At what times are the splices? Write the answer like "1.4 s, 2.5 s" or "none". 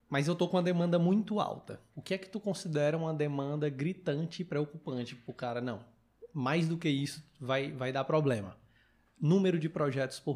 none